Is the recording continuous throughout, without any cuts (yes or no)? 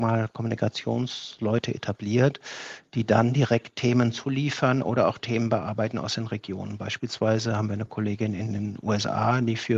yes